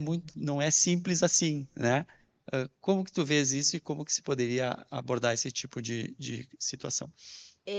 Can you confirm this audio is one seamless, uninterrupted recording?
yes; 0 cuts

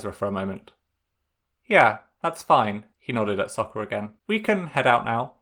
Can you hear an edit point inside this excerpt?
yes; 2 cuts; at 2.9 s, 4.2 s

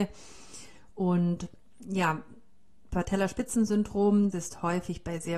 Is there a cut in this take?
yes; 1 cut; at 4.3 s

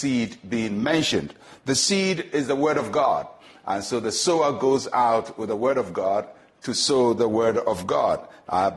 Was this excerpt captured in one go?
yes; 0 cuts

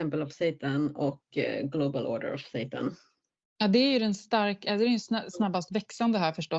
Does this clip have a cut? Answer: no; 0 cuts

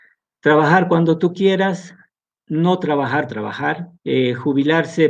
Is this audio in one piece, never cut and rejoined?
no; 3 cuts; at 2.1 s, 3.3 s, 4.0 s

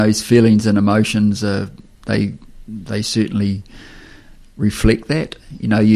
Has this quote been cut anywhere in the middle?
no; 0 cuts

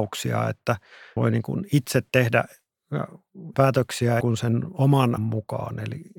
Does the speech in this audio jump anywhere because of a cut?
yes; 4 cuts; at 1.2 s, 3.5 s, 4.2 s, 5.2 s

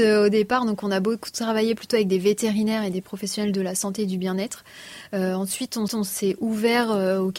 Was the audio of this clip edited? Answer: yes; 1 cut; at 5.9 s

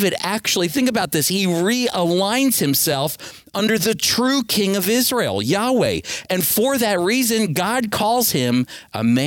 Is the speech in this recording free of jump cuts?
yes; 0 cuts

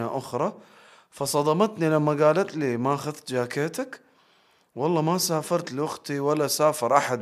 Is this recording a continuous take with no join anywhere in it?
yes; 0 cuts

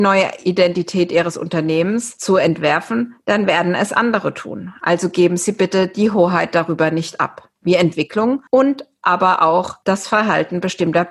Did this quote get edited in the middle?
yes; 2 cuts; at 7.6 s, 8.5 s

